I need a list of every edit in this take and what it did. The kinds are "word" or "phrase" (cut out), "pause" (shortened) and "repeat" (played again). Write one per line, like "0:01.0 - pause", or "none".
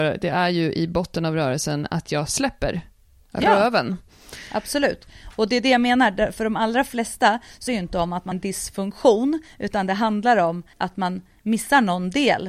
0:07.7 - word
0:08.3 - word
0:10.7 - pause